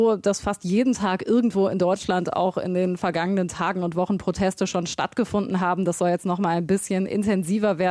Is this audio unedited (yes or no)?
yes